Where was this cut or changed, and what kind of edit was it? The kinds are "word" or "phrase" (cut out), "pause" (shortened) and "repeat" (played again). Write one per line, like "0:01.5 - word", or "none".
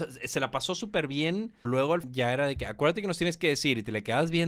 0:01.6 - word
0:02.0 - phrase